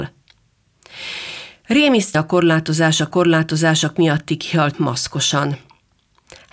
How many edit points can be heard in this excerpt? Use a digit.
3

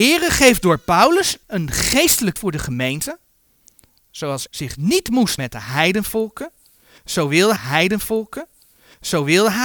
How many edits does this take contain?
5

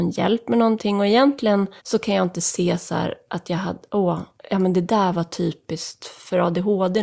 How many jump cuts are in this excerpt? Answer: 2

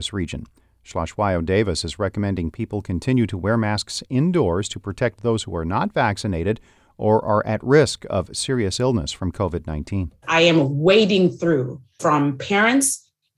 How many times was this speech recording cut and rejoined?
1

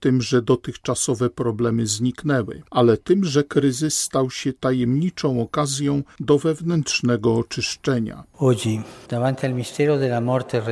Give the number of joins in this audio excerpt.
1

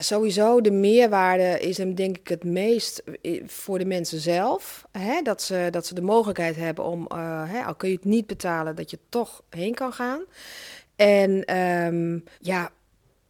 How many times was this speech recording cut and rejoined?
2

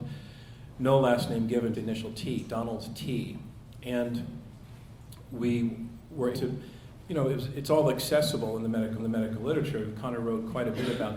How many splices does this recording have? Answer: 3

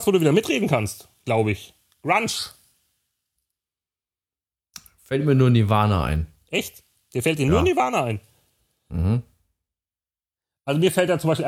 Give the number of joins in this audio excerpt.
0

